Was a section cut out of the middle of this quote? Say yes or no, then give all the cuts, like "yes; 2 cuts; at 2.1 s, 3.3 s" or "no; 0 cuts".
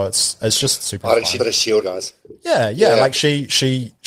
yes; 2 cuts; at 1.4 s, 1.8 s